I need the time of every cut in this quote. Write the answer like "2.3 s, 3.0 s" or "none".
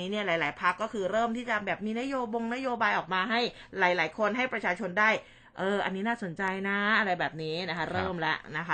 none

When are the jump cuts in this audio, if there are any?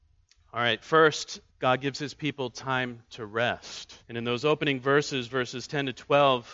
1.5 s, 4.0 s

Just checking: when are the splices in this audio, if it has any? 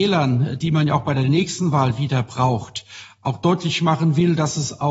none

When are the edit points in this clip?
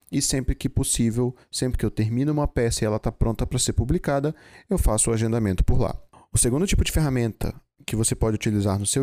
none

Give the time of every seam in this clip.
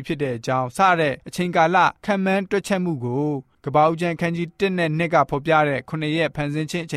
1.2 s

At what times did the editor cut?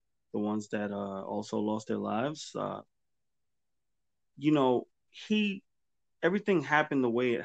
none

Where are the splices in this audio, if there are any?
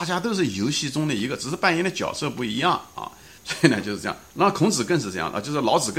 3.4 s

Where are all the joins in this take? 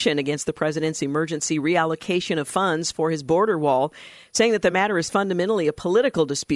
none

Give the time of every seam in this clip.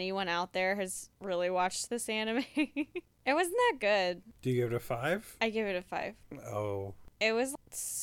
none

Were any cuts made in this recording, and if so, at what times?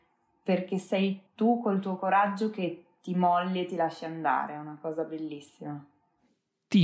1.3 s

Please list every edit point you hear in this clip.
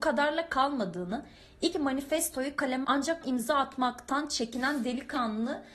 1.7 s, 2.8 s, 3.2 s

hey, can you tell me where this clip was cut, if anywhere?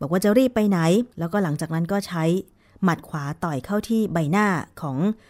1.1 s

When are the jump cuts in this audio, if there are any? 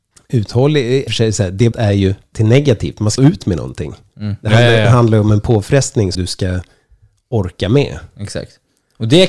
1.1 s, 1.7 s, 2.3 s, 3.2 s, 6.1 s

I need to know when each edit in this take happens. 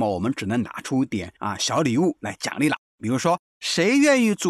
1.4 s

